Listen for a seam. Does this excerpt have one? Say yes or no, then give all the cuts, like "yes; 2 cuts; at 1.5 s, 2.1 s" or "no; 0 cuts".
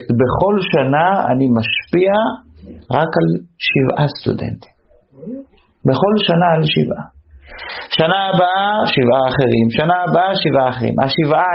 yes; 1 cut; at 2.9 s